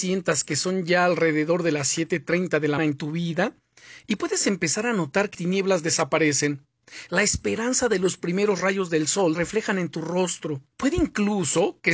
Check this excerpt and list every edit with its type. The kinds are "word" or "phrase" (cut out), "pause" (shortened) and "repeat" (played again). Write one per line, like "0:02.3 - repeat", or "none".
0:02.8 - word
0:05.3 - word
0:09.3 - word
0:10.7 - pause